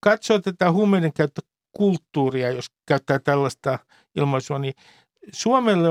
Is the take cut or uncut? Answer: uncut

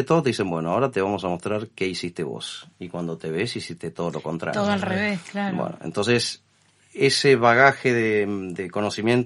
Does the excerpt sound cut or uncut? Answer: uncut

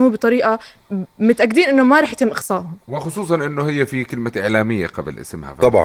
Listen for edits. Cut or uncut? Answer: uncut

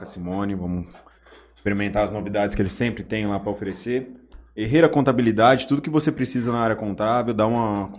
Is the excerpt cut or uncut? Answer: uncut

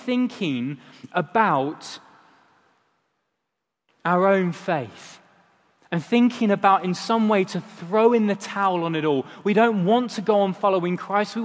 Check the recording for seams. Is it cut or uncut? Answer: uncut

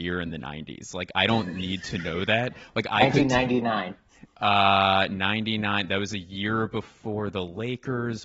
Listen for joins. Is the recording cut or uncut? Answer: uncut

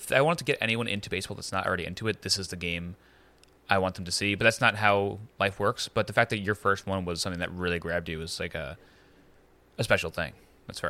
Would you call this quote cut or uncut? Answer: uncut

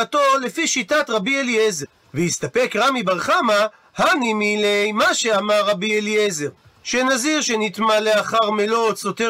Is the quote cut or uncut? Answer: uncut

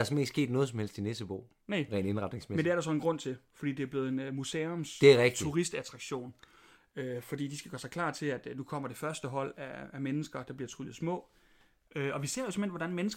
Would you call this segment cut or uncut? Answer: uncut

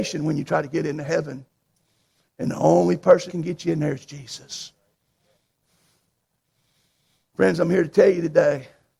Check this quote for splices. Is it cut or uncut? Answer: cut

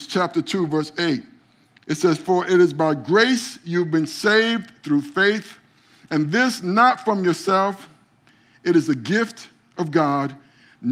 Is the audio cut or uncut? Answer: uncut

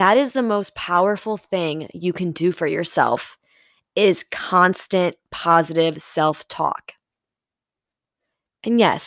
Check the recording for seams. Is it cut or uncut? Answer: uncut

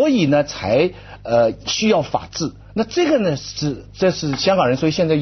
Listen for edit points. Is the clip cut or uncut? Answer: cut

